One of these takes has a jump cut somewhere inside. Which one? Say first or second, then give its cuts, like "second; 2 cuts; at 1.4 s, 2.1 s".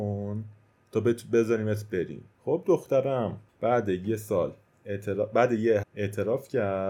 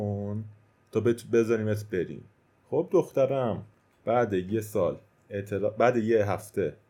first; 3 cuts; at 2.3 s, 3.5 s, 5.8 s